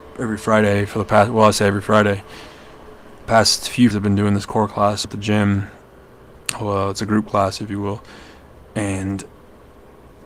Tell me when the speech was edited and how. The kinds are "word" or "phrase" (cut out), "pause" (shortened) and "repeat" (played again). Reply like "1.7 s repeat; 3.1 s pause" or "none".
3.2 s word; 3.9 s word; 5.0 s word